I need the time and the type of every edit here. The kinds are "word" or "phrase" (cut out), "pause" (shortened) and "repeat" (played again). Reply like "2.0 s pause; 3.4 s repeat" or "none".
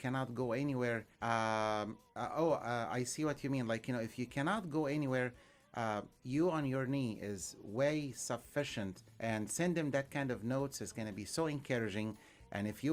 1.1 s pause; 9.1 s pause